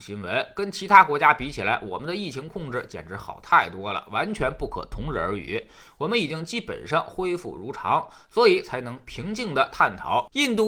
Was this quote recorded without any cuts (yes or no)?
yes